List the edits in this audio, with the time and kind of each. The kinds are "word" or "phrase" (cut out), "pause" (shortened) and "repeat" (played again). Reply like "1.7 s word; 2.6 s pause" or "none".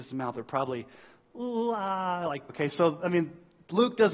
2.5 s word